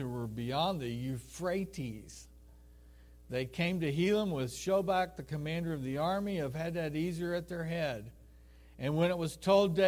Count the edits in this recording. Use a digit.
0